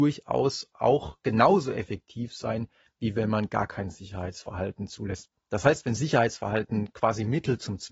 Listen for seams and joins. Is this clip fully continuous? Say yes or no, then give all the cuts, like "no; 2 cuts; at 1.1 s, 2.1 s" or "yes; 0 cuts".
yes; 0 cuts